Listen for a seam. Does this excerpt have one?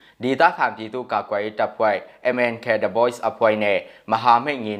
no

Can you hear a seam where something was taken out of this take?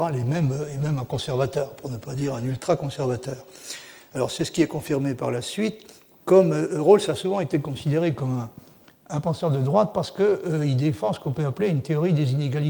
no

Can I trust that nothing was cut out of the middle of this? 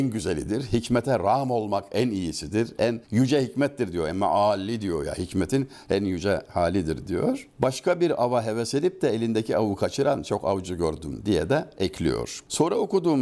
no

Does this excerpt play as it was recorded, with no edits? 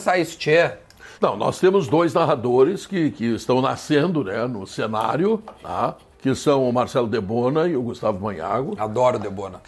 no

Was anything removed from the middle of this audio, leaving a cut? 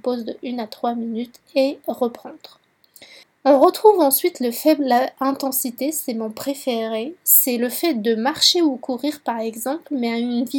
yes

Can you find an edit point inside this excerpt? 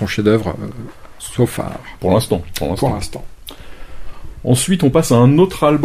no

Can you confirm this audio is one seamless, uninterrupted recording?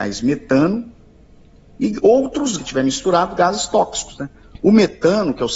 no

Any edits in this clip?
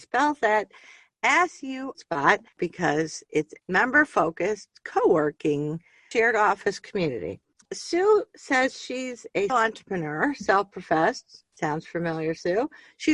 yes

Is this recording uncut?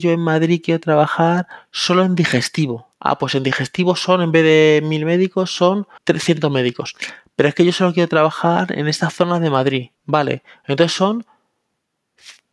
no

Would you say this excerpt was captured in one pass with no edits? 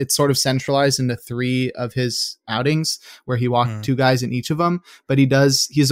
yes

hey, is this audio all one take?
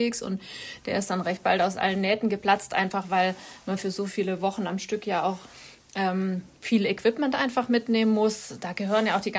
yes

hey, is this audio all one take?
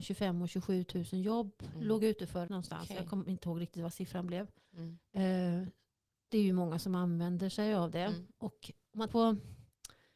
no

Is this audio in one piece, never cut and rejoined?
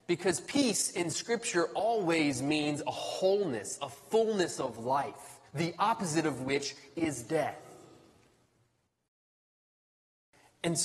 no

